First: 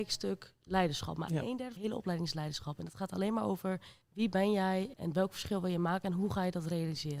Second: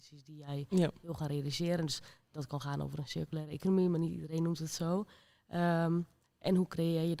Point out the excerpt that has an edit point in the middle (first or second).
first